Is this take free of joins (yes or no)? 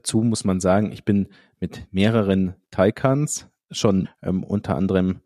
no